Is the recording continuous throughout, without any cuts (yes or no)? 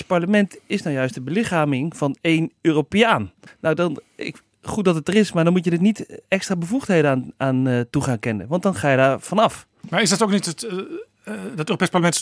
no